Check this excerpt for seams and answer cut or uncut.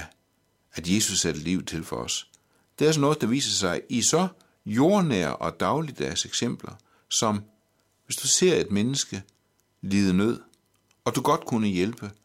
uncut